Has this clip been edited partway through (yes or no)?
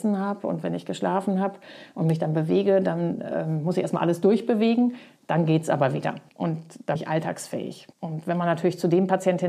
yes